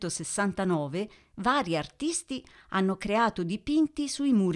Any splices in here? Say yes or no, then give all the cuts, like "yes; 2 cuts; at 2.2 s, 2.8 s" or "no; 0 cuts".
no; 0 cuts